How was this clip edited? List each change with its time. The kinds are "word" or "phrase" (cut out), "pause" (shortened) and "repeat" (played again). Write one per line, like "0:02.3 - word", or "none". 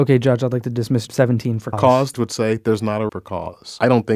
0:01.1 - word
0:01.7 - word
0:02.1 - word
0:03.1 - word